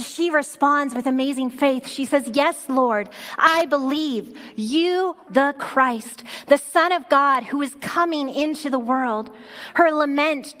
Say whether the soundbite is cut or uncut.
cut